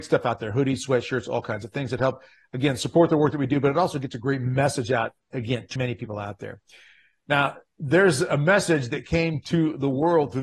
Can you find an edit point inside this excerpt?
yes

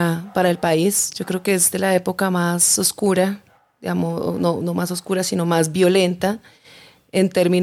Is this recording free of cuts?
yes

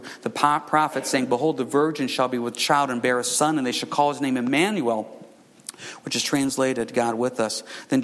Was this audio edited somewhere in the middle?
no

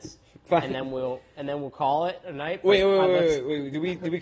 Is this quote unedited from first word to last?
yes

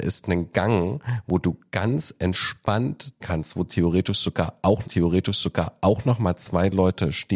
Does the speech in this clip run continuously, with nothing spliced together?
no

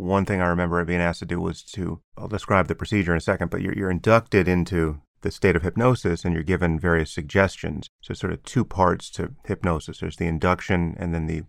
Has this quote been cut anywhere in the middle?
yes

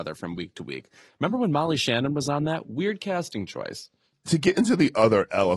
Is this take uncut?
yes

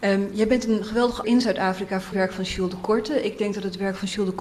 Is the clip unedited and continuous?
no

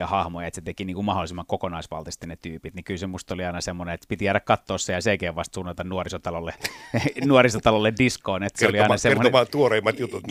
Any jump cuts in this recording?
no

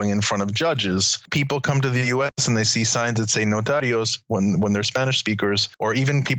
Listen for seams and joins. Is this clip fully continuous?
yes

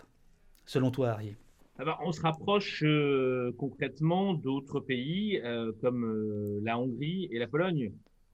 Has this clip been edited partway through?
yes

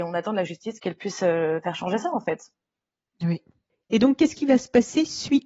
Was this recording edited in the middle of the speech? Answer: no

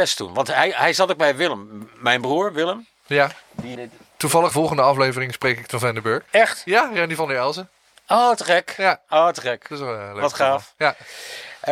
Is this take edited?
yes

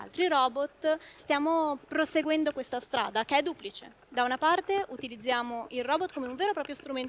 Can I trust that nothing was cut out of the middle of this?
no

